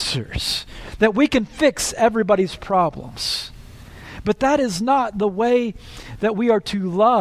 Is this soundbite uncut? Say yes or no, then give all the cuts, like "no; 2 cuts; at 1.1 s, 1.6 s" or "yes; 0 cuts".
yes; 0 cuts